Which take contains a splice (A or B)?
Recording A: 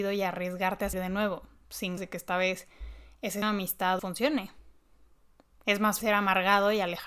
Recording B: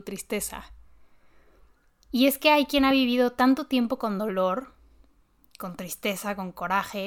A